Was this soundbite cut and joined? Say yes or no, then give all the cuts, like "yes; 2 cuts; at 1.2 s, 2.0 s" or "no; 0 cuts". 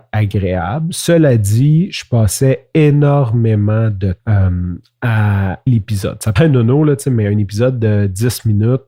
yes; 3 cuts; at 4.2 s, 5.7 s, 6.4 s